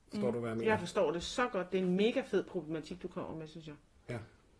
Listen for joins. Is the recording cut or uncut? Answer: uncut